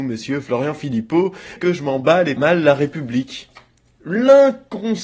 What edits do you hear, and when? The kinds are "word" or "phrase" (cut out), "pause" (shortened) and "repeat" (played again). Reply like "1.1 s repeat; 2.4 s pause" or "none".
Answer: 1.6 s word; 2.4 s phrase